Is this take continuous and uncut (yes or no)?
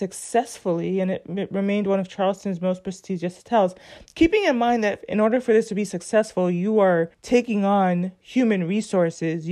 no